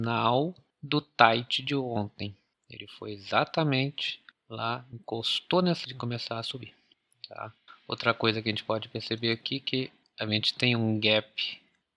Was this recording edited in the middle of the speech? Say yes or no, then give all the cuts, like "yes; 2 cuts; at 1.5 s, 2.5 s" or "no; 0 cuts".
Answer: yes; 1 cut; at 5.9 s